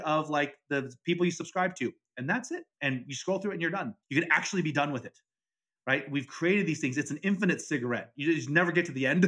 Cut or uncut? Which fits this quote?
cut